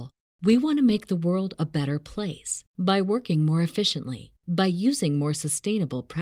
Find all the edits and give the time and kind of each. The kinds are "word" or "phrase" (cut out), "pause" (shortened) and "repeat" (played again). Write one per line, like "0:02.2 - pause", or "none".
0:02.7 - pause
0:04.4 - pause

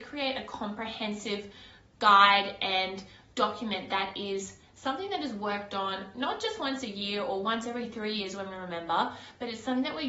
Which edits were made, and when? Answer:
none

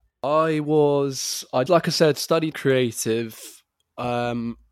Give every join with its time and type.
0:01.7 - word
0:02.5 - word

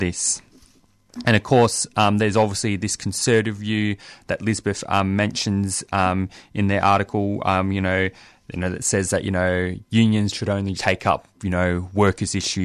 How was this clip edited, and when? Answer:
0:10.8 - word

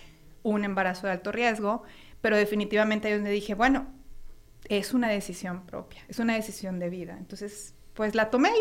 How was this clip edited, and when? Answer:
none

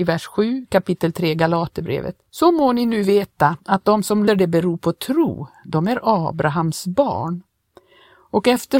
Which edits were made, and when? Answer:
0:02.3 - pause
0:04.3 - word

